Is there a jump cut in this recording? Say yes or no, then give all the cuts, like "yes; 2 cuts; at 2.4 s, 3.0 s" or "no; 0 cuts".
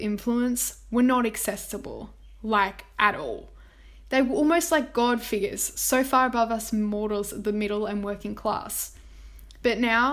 no; 0 cuts